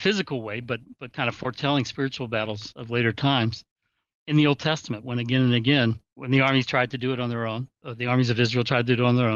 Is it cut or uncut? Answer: cut